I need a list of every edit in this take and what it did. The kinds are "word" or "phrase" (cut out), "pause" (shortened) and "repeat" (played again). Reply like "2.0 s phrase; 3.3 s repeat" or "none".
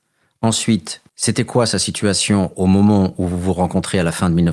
1.1 s pause